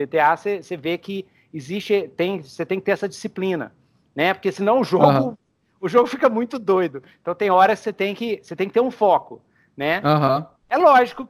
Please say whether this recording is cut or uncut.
uncut